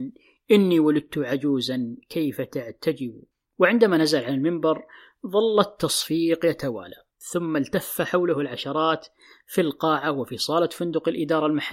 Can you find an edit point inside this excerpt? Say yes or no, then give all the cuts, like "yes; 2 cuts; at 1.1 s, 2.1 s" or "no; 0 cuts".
yes; 1 cut; at 3.3 s